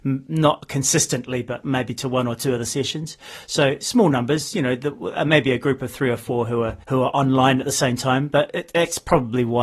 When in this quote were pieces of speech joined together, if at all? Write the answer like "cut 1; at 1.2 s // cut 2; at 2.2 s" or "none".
cut 1; at 6.8 s